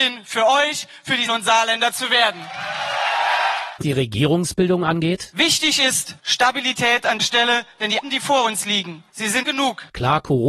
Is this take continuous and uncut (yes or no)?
no